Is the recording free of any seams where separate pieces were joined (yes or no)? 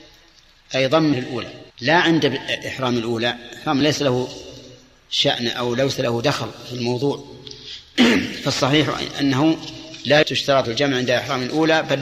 no